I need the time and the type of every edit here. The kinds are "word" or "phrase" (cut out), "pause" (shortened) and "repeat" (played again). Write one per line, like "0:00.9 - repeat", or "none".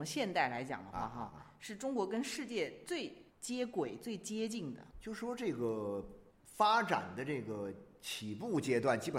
0:03.3 - pause
0:04.9 - pause
0:06.3 - pause